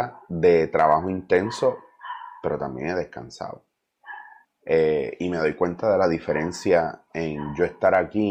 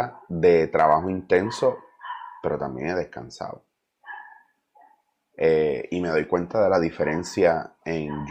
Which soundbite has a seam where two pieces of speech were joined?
first; 1 cut; at 4.4 s

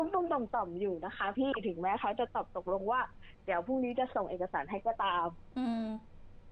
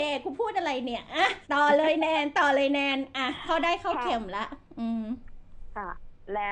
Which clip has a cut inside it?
second; 1 cut; at 1.4 s

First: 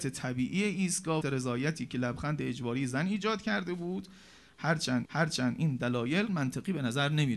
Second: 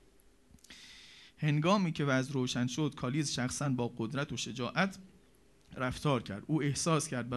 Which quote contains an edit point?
first; 3 cuts; at 1.2 s, 5.0 s, 6.3 s

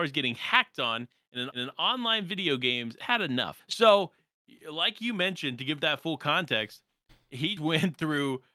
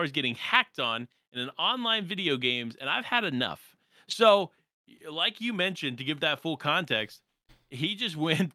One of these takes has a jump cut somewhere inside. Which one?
first; 4 cuts; at 1.5 s, 3.0 s, 3.6 s, 7.6 s

